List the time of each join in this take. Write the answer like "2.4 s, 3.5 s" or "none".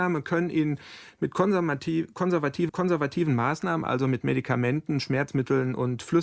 2.7 s

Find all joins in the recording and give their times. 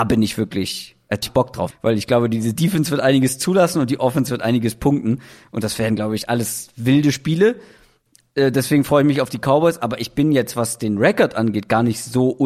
1.2 s, 1.7 s

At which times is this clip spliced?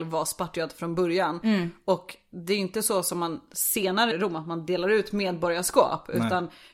4.1 s

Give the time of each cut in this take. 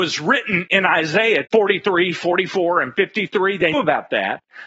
1.5 s, 3.7 s

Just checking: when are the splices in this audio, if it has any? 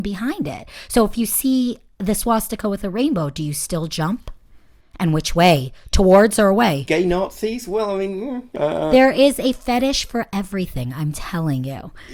none

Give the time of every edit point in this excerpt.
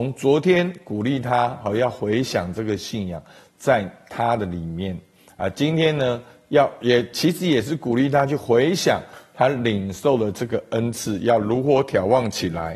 none

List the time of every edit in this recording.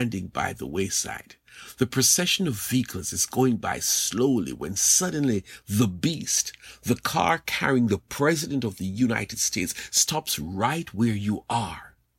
none

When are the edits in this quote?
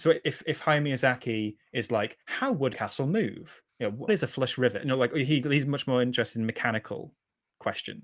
2.7 s, 3.7 s, 4.1 s

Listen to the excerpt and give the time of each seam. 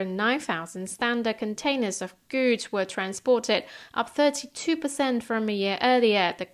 none

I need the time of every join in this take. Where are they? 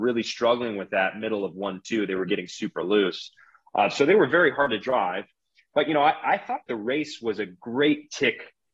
none

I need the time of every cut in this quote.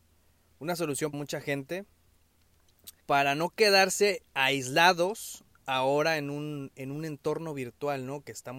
1.1 s, 3.0 s

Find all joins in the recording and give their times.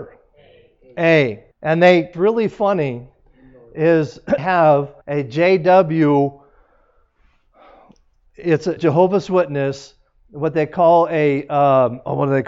1.5 s, 2.1 s, 4.4 s, 5.0 s, 8.8 s

